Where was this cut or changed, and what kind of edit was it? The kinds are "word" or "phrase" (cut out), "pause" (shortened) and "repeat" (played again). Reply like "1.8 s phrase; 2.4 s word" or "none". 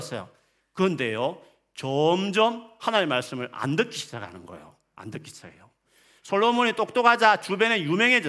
none